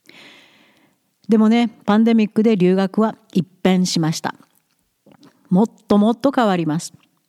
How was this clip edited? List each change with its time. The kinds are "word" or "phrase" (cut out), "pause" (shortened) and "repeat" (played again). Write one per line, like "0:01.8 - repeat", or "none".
none